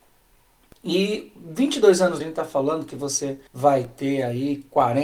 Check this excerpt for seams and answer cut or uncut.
cut